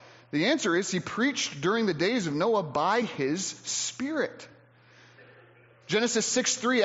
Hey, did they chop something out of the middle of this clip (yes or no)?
no